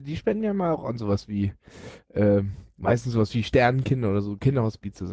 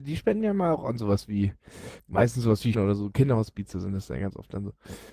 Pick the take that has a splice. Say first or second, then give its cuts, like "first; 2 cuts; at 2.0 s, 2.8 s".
second; 2 cuts; at 2.0 s, 2.7 s